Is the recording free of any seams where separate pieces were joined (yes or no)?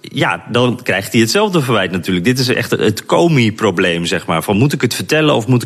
yes